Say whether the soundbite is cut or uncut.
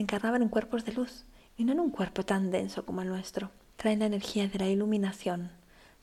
uncut